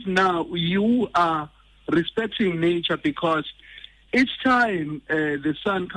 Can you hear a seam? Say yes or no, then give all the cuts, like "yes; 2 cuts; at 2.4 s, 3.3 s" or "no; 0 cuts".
no; 0 cuts